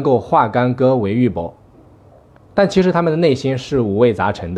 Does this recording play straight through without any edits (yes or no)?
yes